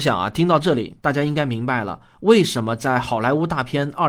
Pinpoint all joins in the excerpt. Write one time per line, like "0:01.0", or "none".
0:01.0